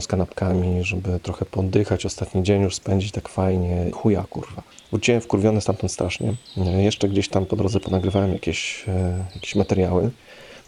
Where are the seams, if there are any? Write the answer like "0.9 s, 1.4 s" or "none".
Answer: 3.9 s, 4.7 s